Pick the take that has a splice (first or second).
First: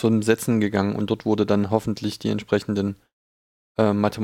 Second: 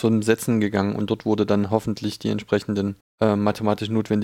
second